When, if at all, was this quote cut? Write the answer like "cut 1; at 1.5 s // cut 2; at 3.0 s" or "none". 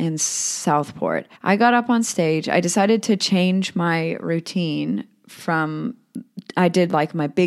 cut 1; at 1.4 s